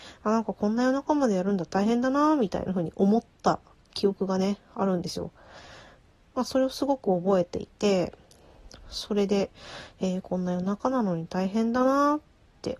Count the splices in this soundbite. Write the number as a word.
one